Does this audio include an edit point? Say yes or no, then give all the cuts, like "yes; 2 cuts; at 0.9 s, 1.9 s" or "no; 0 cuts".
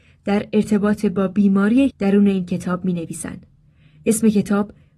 yes; 1 cut; at 1.9 s